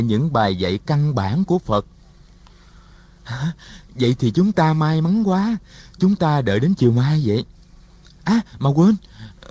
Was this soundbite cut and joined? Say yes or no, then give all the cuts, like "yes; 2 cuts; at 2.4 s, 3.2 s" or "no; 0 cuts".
no; 0 cuts